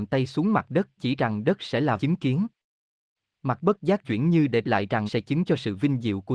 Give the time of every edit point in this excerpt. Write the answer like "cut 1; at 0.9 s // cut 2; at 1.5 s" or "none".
cut 1; at 1.0 s // cut 2; at 2.0 s // cut 3; at 3.6 s // cut 4; at 4.0 s // cut 5; at 4.6 s // cut 6; at 5.1 s // cut 7; at 5.4 s